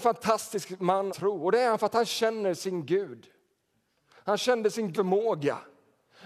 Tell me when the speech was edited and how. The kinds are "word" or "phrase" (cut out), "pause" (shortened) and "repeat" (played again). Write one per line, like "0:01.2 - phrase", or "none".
0:01.1 - word
0:04.9 - word